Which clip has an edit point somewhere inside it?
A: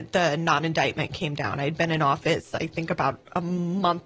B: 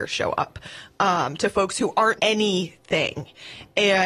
B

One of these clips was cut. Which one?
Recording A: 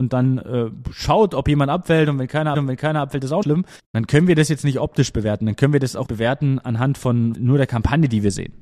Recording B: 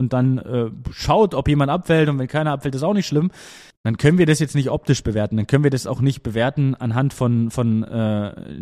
A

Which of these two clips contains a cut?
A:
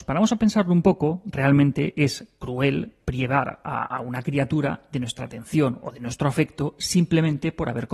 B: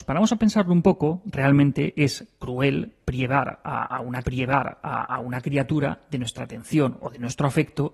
B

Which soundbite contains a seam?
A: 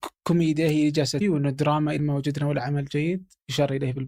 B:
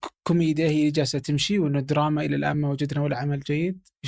A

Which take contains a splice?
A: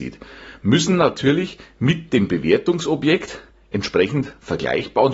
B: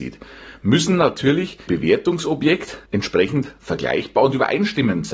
B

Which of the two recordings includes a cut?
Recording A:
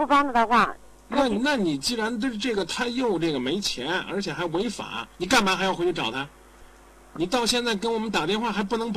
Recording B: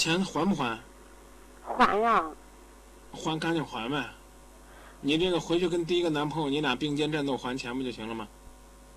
A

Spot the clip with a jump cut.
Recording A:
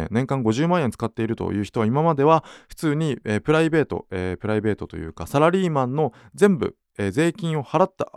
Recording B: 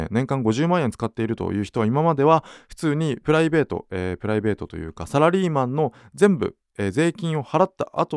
B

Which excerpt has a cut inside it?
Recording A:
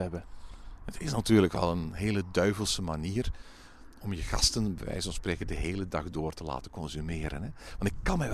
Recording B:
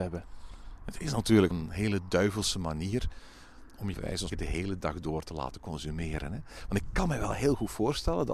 B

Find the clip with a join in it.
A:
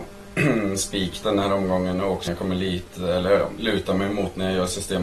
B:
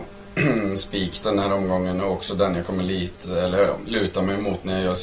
A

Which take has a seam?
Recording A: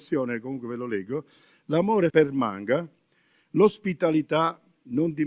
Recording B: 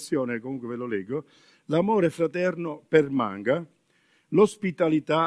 A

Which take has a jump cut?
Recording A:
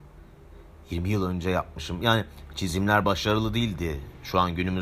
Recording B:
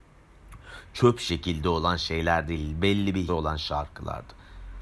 B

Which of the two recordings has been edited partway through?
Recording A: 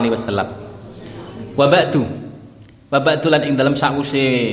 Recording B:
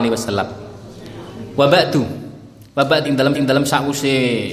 B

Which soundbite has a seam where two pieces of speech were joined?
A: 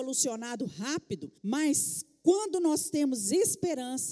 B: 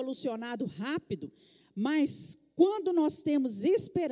A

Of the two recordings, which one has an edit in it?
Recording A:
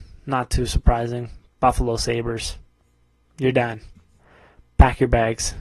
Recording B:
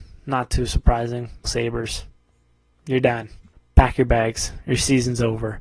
B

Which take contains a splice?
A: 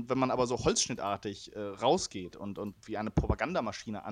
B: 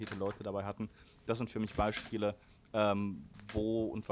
A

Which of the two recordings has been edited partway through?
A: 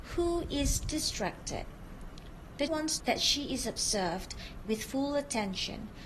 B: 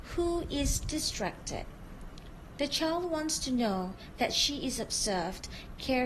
A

